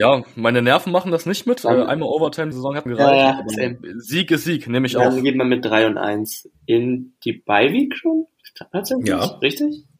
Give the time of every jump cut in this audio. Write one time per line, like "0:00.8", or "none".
0:02.5
0:02.9